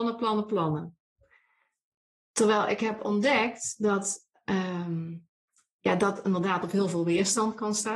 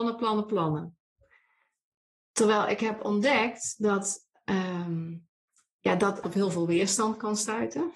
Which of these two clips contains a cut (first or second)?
second